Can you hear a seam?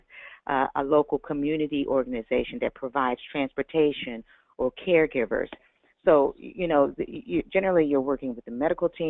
no; 0 cuts

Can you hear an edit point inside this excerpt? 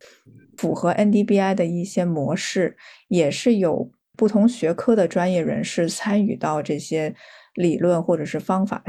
no; 0 cuts

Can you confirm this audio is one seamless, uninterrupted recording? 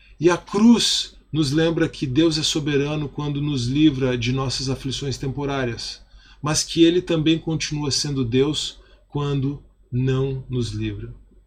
yes; 0 cuts

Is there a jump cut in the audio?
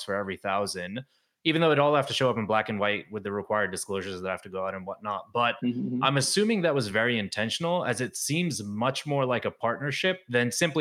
no; 0 cuts

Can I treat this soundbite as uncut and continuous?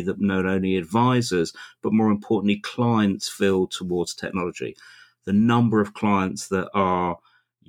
yes; 0 cuts

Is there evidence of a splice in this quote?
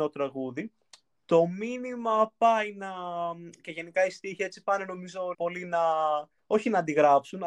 yes; 2 cuts; at 5.3 s, 6.4 s

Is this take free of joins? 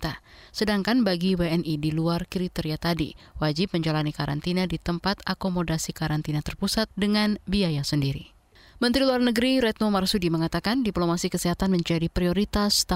yes; 0 cuts

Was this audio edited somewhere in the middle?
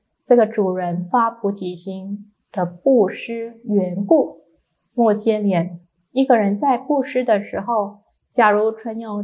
no; 0 cuts

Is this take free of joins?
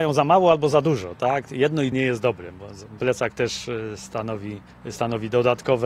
no; 3 cuts; at 1.9 s, 3.0 s, 4.7 s

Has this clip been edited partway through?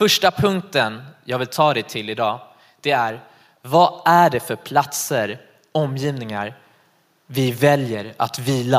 no; 0 cuts

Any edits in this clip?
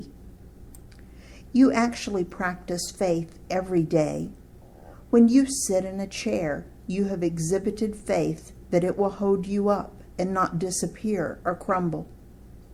no; 0 cuts

